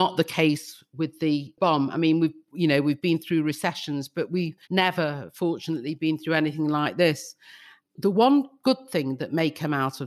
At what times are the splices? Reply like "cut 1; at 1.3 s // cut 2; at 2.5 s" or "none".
cut 1; at 4.6 s